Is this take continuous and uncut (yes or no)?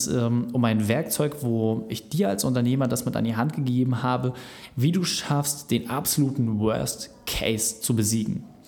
yes